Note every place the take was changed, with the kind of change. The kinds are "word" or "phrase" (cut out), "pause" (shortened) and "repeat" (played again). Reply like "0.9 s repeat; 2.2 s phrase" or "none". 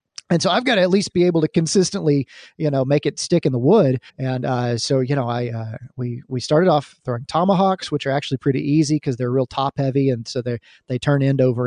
4.1 s pause